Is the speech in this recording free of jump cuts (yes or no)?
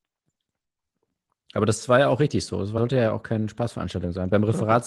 no